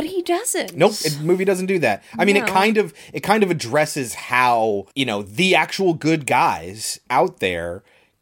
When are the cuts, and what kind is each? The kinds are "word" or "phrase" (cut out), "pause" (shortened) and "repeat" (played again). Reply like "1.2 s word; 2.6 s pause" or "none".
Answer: 4.9 s pause